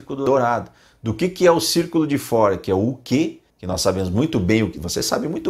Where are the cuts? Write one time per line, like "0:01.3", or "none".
0:03.5